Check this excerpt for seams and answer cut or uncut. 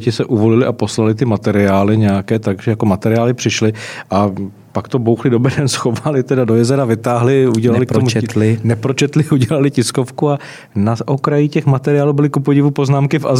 uncut